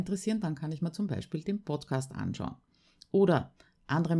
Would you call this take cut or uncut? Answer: uncut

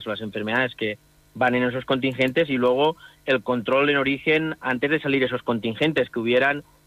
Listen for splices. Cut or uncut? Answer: uncut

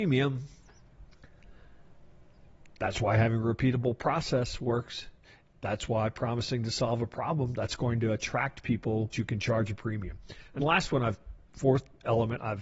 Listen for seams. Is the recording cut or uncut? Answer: cut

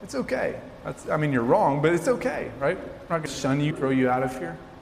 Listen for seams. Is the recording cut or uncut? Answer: cut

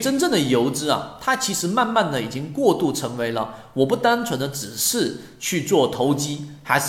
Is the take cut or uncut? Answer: uncut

